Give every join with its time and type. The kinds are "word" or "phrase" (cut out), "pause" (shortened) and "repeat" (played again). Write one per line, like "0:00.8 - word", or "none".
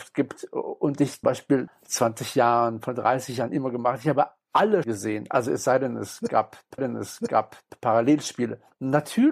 0:01.2 - word
0:01.7 - phrase
0:04.8 - word
0:06.8 - repeat